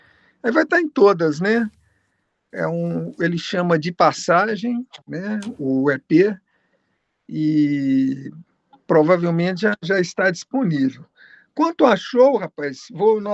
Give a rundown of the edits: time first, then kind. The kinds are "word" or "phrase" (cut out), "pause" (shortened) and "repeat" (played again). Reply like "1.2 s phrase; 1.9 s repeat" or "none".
5.0 s pause